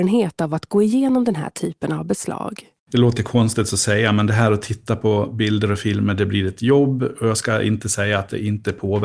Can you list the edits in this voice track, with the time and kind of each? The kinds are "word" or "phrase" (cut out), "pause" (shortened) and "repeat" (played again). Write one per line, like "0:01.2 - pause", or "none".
0:02.8 - pause